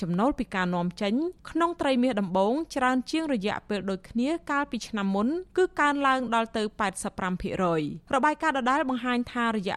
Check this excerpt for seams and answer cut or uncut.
cut